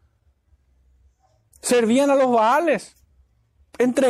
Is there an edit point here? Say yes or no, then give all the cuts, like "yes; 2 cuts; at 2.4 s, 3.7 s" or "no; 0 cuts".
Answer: no; 0 cuts